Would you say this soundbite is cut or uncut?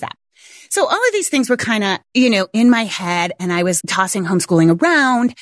cut